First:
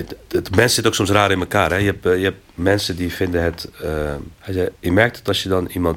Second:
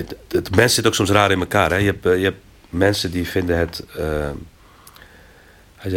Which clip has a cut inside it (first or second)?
first